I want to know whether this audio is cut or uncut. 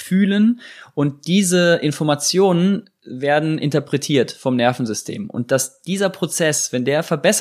uncut